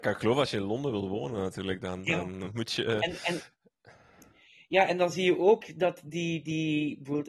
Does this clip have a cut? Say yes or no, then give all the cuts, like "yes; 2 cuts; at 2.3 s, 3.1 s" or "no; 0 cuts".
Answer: no; 0 cuts